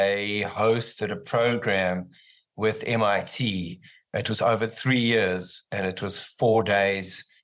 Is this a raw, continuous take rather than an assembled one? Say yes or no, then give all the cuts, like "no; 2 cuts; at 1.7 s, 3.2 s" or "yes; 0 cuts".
yes; 0 cuts